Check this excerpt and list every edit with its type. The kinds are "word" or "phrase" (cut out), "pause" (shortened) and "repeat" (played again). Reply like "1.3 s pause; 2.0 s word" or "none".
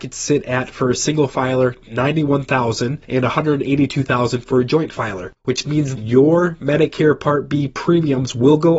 3.0 s pause; 5.4 s pause; 6.0 s word